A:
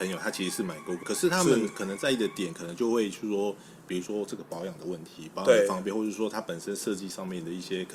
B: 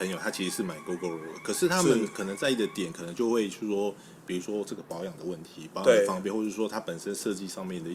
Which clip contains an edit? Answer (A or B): A